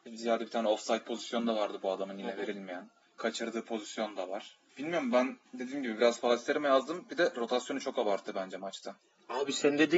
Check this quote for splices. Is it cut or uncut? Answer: cut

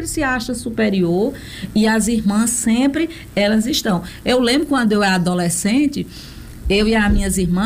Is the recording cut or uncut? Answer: uncut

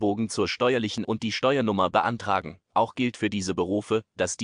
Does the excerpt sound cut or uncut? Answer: cut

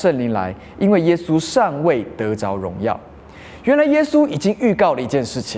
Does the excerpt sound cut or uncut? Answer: uncut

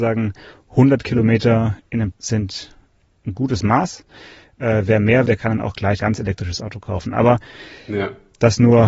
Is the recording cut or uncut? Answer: cut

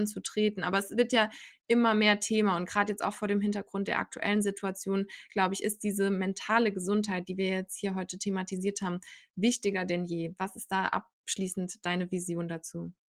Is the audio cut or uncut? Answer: uncut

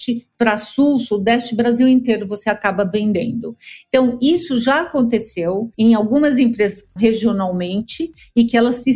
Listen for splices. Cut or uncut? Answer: cut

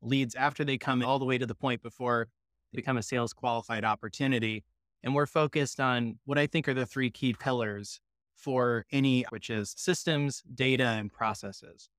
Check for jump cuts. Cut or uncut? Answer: cut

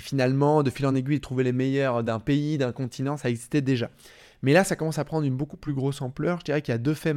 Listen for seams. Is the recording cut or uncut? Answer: uncut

